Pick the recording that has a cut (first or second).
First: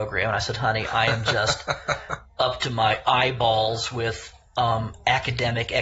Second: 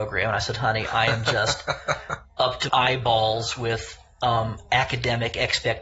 second